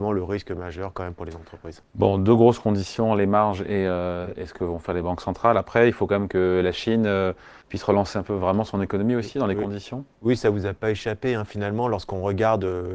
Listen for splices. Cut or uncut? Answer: cut